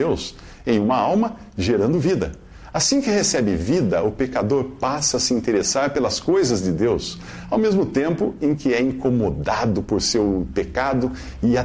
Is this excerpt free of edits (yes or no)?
yes